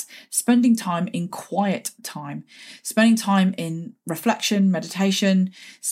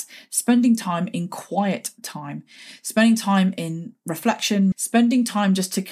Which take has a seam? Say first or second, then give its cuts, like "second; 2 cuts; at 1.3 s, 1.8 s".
second; 1 cut; at 4.7 s